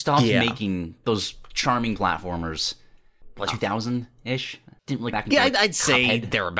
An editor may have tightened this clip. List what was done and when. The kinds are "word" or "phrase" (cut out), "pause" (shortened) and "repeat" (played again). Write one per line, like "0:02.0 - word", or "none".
0:01.0 - word
0:02.0 - word
0:03.5 - word
0:05.1 - word